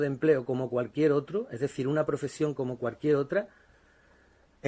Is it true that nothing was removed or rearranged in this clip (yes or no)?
yes